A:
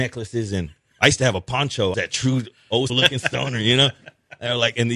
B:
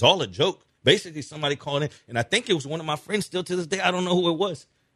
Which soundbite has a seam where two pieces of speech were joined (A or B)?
A